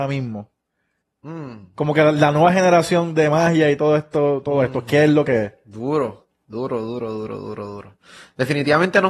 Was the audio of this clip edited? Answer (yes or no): no